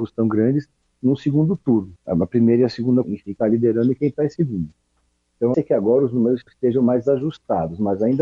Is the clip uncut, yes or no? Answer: no